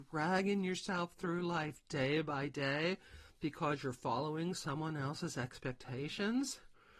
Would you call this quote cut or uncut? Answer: uncut